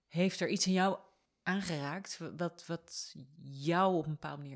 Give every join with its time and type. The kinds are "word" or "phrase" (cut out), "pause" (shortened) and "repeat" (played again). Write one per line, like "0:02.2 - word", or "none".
none